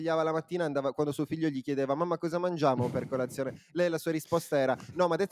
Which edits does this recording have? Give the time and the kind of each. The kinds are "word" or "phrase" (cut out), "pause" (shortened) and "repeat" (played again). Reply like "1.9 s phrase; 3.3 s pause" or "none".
none